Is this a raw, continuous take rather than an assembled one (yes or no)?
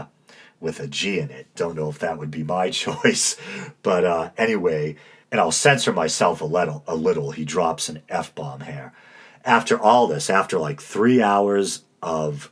yes